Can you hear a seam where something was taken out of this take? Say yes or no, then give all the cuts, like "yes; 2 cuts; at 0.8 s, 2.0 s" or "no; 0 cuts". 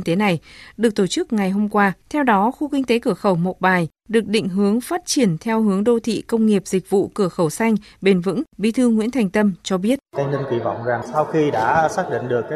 yes; 3 cuts; at 2.0 s, 8.5 s, 10.1 s